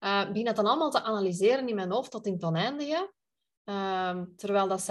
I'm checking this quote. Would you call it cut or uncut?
uncut